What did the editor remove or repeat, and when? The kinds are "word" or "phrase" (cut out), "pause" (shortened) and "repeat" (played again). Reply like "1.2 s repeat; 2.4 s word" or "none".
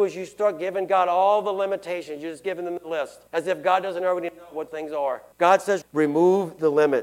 3.3 s pause; 4.7 s word; 5.3 s pause; 5.8 s word